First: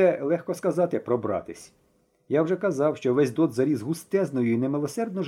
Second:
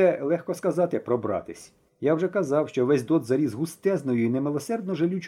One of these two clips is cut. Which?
second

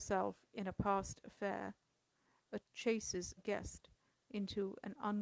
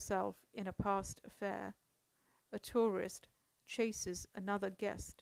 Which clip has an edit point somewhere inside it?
first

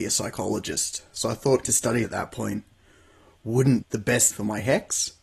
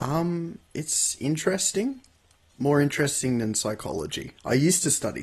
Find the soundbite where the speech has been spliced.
first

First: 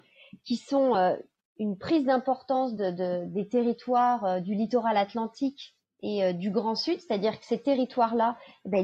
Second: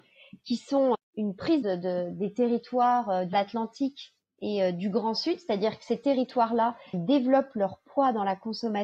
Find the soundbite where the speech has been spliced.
second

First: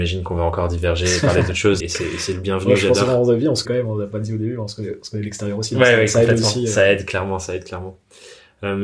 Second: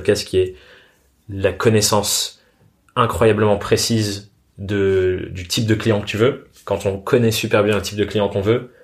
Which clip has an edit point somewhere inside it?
first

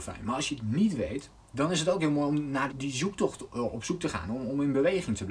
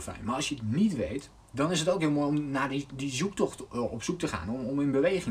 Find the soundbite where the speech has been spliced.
first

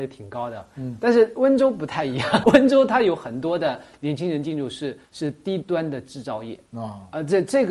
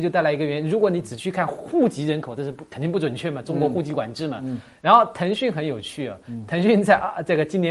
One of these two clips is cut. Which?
first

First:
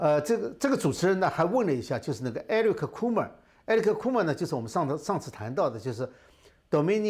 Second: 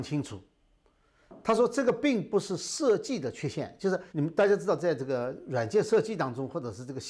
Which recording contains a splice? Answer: second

